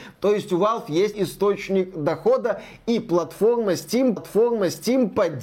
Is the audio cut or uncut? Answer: cut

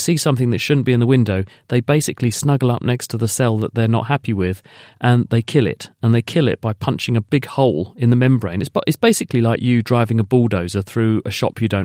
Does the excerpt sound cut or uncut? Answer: uncut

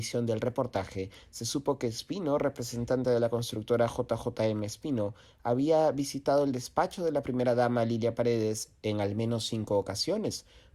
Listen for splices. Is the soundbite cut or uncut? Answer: uncut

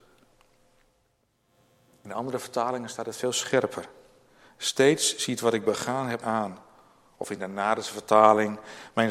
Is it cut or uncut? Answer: cut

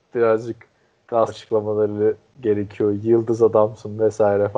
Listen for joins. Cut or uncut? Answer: cut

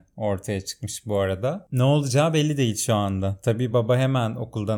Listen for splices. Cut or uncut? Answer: uncut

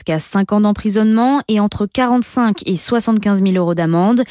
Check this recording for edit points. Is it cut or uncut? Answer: uncut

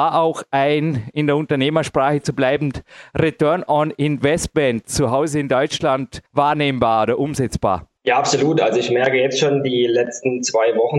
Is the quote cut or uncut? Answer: cut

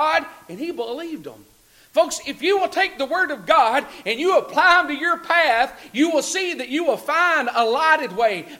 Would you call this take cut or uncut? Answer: uncut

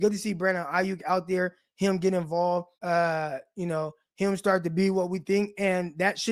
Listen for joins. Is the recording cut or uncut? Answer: cut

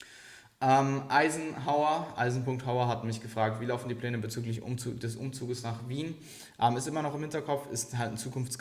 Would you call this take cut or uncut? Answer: uncut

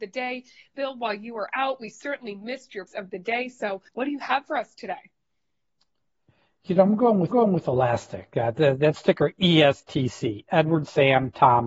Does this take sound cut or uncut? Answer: cut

